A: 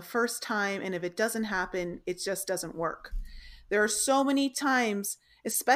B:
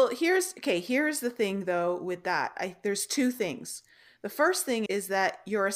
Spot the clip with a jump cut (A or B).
B